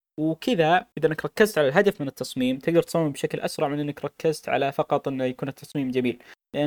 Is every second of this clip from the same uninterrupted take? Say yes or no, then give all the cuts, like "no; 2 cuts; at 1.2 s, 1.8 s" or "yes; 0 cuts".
no; 1 cut; at 0.9 s